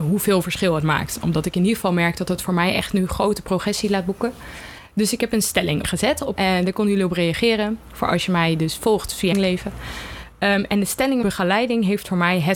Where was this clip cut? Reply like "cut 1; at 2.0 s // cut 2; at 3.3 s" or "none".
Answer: cut 1; at 5.8 s // cut 2; at 6.4 s // cut 3; at 9.3 s // cut 4; at 11.2 s